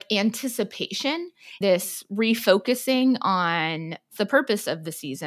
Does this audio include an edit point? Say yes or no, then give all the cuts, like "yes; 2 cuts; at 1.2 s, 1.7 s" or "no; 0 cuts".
yes; 2 cuts; at 1.6 s, 4.2 s